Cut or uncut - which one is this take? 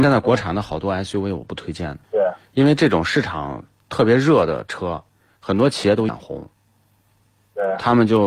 cut